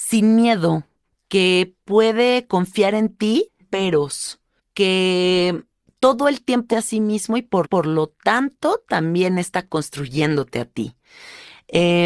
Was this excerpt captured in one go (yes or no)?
no